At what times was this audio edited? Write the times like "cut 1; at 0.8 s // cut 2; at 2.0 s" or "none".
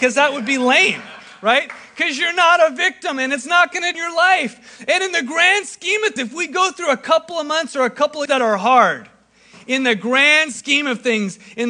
cut 1; at 3.9 s // cut 2; at 6.2 s // cut 3; at 8.3 s

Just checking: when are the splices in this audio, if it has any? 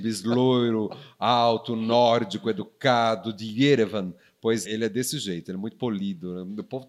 cut 1; at 4.7 s

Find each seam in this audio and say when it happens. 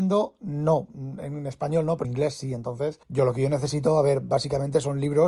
cut 1; at 2.0 s // cut 2; at 3.0 s

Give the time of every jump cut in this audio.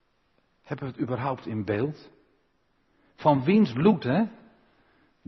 none

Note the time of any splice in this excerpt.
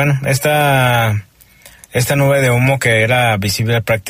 none

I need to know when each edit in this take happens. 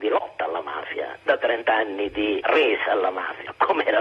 cut 1; at 1.3 s // cut 2; at 2.4 s

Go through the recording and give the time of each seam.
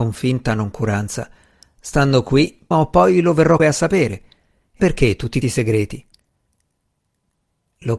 cut 1; at 2.7 s // cut 2; at 3.6 s // cut 3; at 4.8 s // cut 4; at 5.4 s

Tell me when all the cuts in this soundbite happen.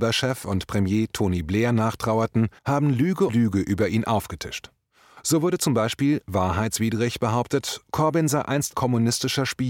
cut 1; at 2.6 s // cut 2; at 3.3 s // cut 3; at 8.7 s

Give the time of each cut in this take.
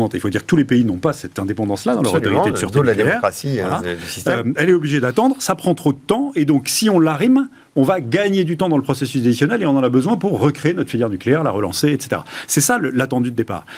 none

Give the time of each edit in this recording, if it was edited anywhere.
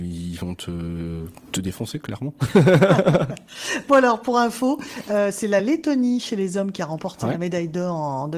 none

